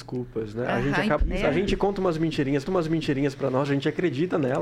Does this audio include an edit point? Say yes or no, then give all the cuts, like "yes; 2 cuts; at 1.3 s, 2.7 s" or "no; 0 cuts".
yes; 2 cuts; at 1.2 s, 2.7 s